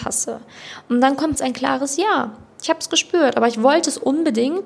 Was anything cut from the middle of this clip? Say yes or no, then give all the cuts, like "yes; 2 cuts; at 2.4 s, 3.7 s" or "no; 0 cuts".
yes; 1 cut; at 1.4 s